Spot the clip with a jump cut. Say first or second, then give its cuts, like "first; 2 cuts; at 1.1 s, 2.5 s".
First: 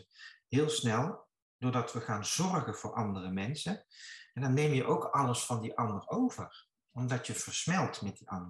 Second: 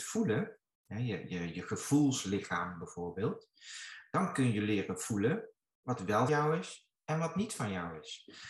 second; 1 cut; at 6.3 s